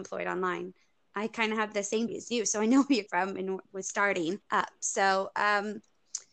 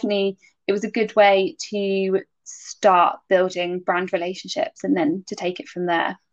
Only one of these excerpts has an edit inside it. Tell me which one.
first; 4 cuts; at 2.1 s, 3.1 s, 3.6 s, 4.4 s

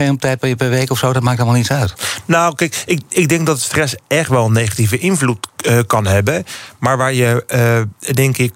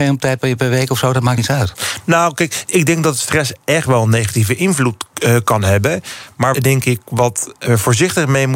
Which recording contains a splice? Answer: second; 3 cuts; at 1.4 s, 2.6 s, 6.5 s

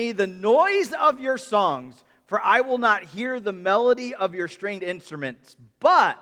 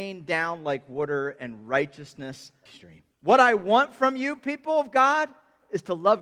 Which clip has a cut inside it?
second; 2 cuts; at 2.7 s, 3.1 s

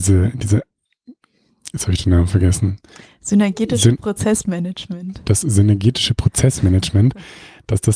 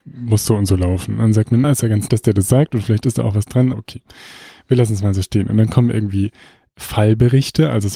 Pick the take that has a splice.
second; 3 cuts; at 1.6 s, 2.1 s, 3.7 s

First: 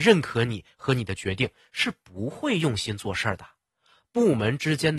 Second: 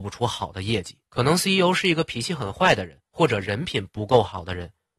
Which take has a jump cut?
second; 1 cut; at 1.1 s

